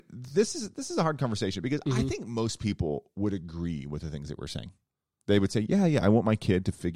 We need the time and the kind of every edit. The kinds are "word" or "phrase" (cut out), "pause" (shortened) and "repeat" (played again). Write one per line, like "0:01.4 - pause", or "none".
none